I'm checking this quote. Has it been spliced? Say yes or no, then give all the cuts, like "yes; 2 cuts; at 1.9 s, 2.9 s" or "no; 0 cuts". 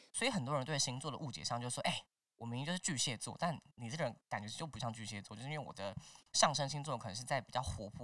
no; 0 cuts